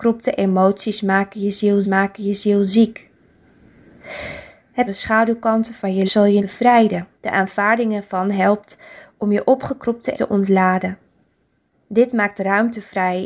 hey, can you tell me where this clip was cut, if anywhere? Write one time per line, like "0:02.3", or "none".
0:01.8
0:04.9
0:06.1
0:06.4
0:07.2
0:10.1